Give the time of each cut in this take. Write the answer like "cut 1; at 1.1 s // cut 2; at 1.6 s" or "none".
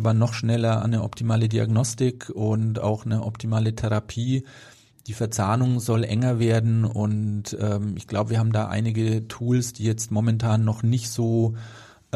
none